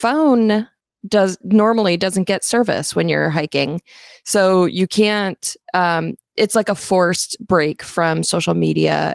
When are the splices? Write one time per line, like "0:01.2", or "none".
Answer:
none